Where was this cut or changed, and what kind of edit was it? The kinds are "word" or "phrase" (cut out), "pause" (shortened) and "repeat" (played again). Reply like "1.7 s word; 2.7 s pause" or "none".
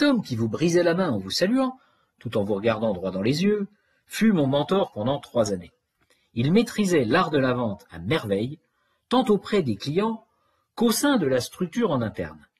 none